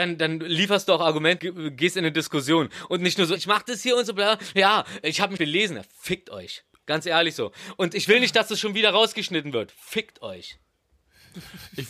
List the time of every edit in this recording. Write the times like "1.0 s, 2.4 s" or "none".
1.4 s, 3.4 s, 5.4 s